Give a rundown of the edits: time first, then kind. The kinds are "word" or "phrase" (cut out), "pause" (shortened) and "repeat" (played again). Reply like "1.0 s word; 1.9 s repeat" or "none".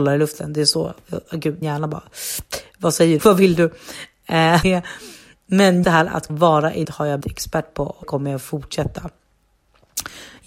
1.6 s word; 3.2 s word; 4.6 s word; 5.8 s word; 6.3 s word; 6.8 s word; 7.2 s word; 8.0 s word